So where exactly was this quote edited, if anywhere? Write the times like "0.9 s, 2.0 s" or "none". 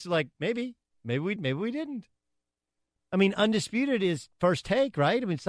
1.4 s